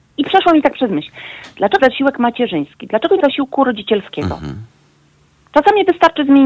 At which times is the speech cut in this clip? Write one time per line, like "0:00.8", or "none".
0:01.8
0:03.2